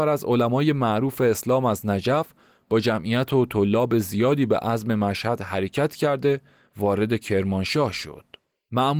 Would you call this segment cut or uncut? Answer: uncut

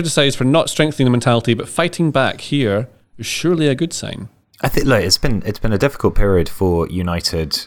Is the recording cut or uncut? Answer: uncut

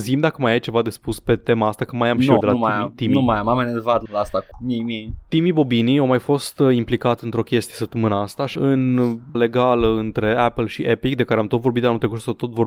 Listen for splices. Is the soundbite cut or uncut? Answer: cut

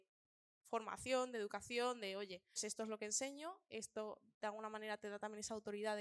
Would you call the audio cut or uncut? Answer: cut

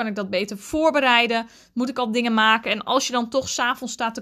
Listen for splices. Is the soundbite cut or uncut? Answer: uncut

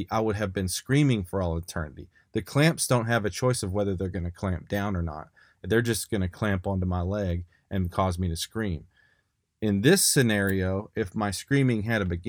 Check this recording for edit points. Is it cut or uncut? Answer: uncut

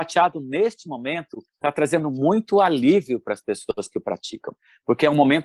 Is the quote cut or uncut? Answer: cut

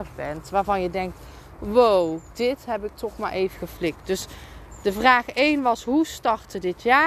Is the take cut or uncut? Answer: uncut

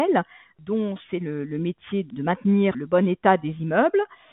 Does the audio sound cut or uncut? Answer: uncut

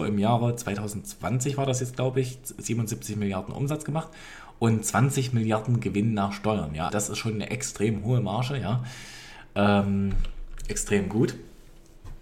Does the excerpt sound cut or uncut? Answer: cut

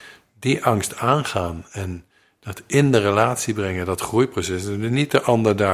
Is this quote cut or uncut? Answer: uncut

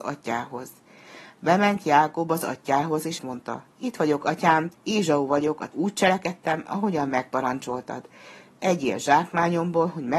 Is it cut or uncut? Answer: cut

